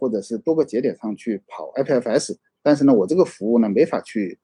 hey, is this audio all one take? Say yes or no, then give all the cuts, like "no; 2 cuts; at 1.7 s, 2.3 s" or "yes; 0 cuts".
yes; 0 cuts